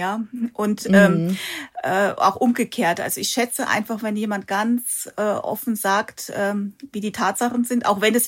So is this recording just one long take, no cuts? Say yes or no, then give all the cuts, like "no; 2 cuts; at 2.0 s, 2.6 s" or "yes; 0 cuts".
yes; 0 cuts